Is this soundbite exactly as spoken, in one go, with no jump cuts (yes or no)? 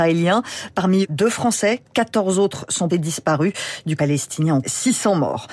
no